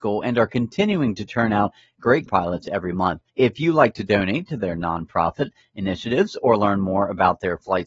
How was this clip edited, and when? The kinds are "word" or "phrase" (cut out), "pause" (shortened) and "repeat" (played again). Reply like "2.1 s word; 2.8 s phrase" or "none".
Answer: 2.3 s word; 3.3 s pause